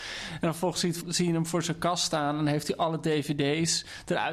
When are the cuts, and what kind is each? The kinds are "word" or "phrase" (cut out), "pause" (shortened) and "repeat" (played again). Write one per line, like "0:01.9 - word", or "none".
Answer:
0:01.0 - phrase